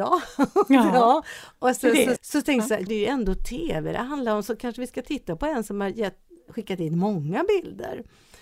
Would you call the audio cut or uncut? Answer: cut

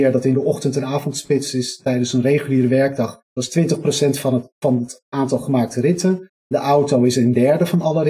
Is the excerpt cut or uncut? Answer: cut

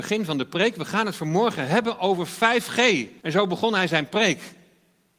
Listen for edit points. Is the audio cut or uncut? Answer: cut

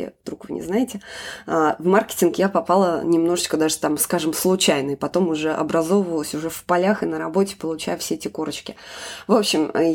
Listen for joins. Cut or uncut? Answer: uncut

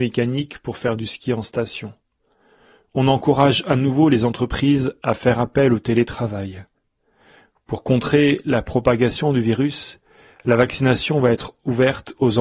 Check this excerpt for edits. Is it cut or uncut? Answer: uncut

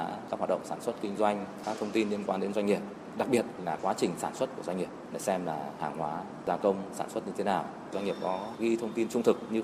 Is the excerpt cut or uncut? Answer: uncut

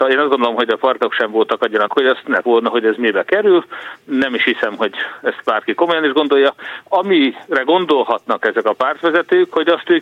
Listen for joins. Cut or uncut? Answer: cut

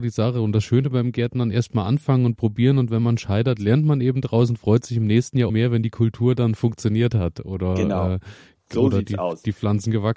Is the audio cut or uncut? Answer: cut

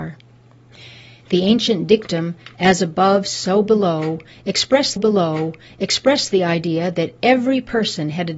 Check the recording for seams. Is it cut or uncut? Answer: cut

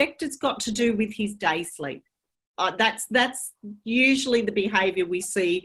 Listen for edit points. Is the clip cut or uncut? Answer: uncut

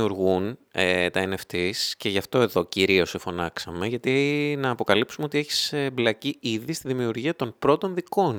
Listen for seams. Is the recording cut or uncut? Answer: uncut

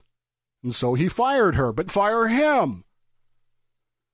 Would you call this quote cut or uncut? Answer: cut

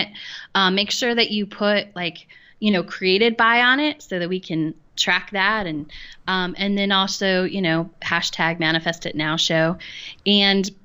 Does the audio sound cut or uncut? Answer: uncut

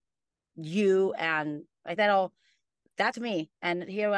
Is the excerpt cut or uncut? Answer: cut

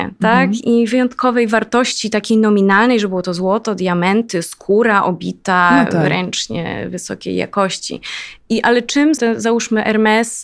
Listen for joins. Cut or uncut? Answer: cut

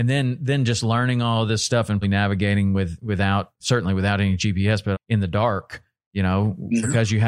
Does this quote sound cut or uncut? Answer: cut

